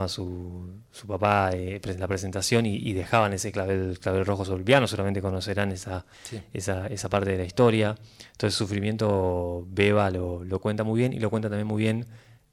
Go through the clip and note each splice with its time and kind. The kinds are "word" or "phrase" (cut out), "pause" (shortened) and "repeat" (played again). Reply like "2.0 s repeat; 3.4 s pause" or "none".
6.1 s pause

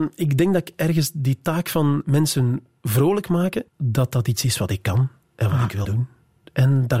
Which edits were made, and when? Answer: 3.7 s pause; 5.8 s word

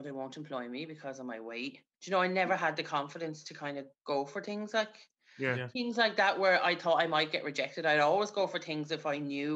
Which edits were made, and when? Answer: 1.9 s pause; 4.0 s pause

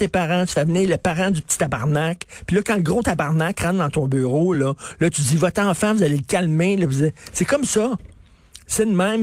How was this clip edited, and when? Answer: none

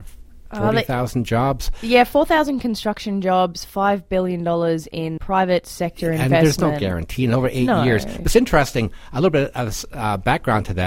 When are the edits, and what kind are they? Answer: 5.2 s word

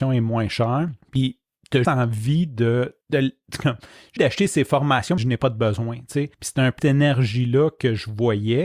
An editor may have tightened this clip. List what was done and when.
1.0 s pause; 1.8 s word; 3.0 s pause; 4.2 s word; 5.2 s word; 6.3 s pause; 6.8 s word

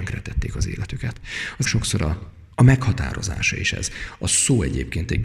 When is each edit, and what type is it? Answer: 1.6 s word; 2.5 s pause

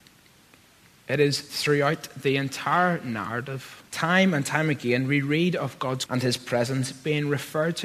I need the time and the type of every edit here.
3.9 s pause; 6.1 s word

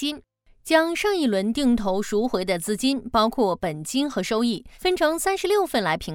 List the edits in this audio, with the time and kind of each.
4.7 s pause

